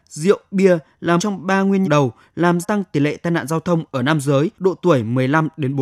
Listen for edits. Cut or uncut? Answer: cut